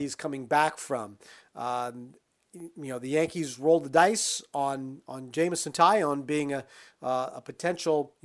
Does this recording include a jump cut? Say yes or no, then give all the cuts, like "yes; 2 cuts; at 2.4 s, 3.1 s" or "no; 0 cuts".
no; 0 cuts